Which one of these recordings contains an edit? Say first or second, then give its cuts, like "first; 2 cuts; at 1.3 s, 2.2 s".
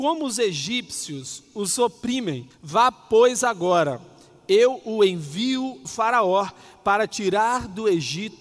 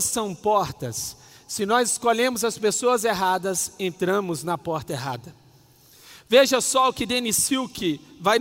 first; 2 cuts; at 2.5 s, 5.8 s